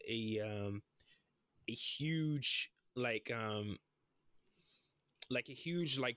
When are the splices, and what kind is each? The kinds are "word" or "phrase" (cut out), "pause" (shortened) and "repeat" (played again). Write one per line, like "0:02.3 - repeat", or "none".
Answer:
none